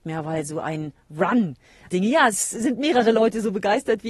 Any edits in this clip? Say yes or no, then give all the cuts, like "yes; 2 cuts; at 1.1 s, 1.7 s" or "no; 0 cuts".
yes; 1 cut; at 1.9 s